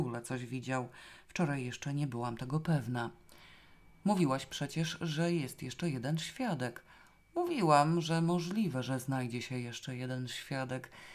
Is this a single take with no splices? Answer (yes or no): yes